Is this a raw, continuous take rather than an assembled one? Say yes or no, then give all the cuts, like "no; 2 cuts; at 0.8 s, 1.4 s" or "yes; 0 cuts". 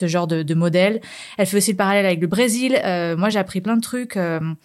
yes; 0 cuts